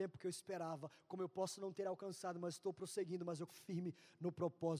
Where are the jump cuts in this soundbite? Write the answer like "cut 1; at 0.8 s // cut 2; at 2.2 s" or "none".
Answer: cut 1; at 3.5 s